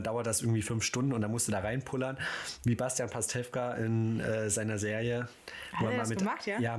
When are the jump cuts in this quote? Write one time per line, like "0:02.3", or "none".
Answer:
none